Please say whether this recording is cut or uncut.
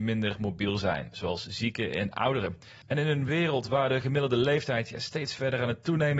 uncut